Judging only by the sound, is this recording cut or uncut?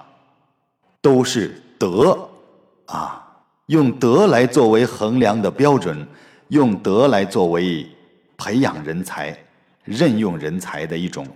uncut